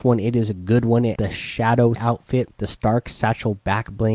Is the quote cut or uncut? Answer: cut